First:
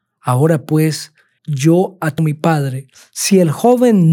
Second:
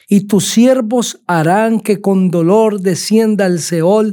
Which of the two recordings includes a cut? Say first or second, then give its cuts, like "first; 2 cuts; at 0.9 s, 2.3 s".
first; 2 cuts; at 1.4 s, 2.2 s